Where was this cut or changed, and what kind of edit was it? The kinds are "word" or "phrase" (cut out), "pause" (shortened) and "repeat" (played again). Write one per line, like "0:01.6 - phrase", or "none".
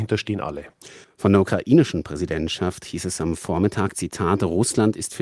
0:01.0 - pause